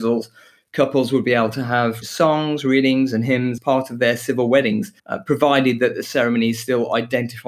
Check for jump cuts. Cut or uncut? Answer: cut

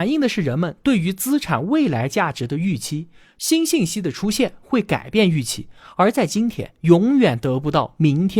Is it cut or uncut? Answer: uncut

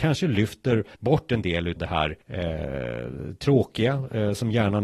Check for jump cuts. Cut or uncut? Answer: cut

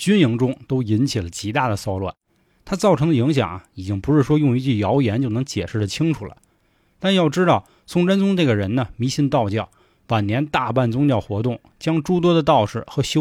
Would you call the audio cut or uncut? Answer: uncut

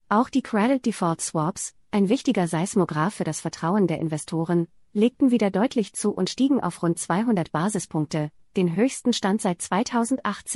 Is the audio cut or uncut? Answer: uncut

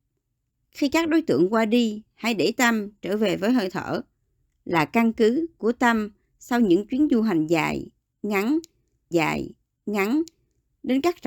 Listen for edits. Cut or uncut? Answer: cut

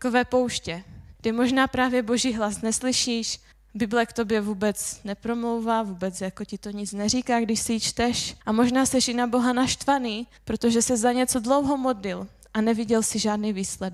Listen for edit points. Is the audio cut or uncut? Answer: cut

